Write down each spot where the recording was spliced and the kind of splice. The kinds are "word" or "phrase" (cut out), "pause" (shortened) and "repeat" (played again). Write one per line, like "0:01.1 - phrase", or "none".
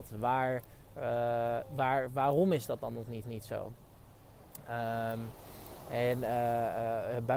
0:03.2 - repeat